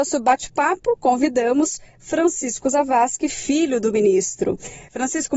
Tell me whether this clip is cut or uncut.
uncut